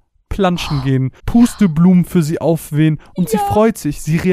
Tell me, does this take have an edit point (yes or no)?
yes